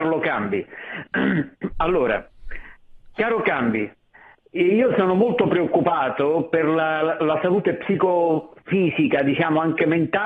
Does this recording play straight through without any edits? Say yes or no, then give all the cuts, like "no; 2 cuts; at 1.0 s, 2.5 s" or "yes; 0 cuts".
yes; 0 cuts